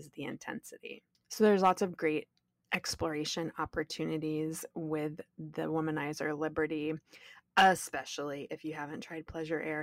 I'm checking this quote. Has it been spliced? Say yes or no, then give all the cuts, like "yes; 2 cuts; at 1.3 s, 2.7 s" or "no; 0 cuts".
no; 0 cuts